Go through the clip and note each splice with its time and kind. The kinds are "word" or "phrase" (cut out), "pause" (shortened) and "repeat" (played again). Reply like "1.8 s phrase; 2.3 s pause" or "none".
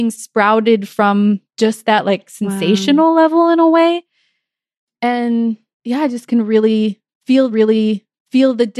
1.5 s pause; 7.5 s repeat